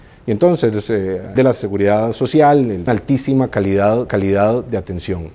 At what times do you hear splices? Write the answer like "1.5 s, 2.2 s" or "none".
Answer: 1.4 s, 2.9 s, 4.1 s